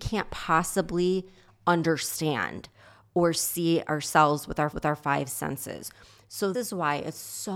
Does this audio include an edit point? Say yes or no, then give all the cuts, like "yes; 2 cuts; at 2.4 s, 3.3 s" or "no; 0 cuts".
yes; 2 cuts; at 4.7 s, 6.5 s